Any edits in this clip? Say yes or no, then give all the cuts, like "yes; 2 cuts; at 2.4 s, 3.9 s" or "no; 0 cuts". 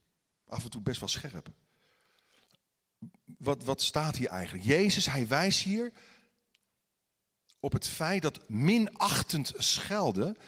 no; 0 cuts